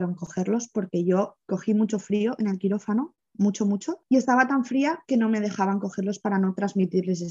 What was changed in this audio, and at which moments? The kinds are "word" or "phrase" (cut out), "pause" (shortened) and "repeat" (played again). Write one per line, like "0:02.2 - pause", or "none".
0:04.0 - pause